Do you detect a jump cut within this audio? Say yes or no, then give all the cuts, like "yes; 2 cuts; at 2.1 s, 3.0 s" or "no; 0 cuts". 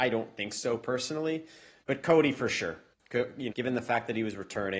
yes; 1 cut; at 3.5 s